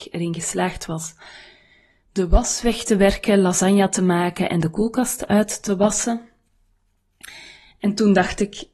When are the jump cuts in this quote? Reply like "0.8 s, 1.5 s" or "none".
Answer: none